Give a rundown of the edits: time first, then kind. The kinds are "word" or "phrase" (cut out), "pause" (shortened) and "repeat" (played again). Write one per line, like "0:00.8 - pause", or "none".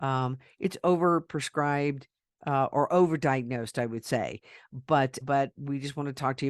0:05.2 - word